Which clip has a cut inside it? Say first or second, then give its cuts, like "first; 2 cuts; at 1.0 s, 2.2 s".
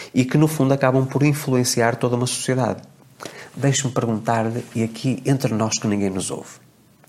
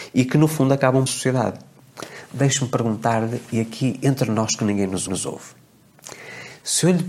second; 2 cuts; at 1.1 s, 5.1 s